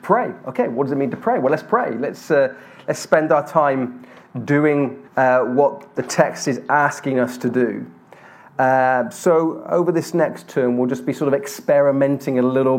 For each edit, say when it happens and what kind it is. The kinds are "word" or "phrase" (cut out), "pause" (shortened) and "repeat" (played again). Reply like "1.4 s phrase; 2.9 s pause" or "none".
5.1 s pause